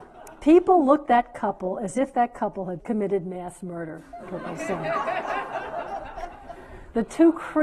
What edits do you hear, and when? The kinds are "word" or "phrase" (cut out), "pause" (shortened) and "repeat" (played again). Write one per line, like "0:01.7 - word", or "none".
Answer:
0:01.1 - word
0:02.8 - word